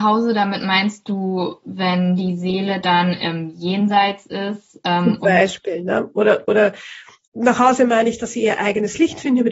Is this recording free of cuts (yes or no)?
no